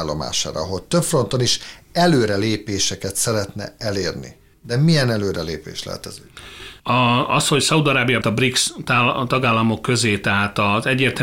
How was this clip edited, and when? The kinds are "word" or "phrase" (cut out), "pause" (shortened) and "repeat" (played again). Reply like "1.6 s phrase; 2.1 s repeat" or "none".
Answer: 4.5 s pause; 6.8 s pause; 8.2 s word